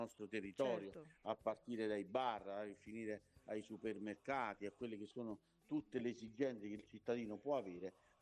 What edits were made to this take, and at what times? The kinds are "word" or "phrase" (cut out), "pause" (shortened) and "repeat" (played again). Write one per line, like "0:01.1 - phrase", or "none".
none